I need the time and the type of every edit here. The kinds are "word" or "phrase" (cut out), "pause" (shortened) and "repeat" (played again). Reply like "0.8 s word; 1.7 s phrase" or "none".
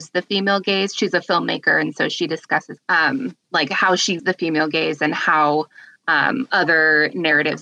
2.8 s phrase; 3.4 s pause; 4.2 s word